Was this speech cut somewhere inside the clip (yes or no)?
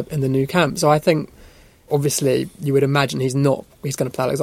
no